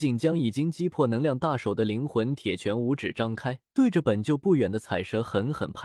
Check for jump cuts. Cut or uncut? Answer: cut